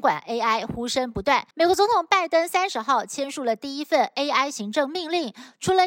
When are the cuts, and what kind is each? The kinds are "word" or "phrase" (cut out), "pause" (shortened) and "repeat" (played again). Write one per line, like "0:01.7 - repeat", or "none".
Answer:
0:01.5 - pause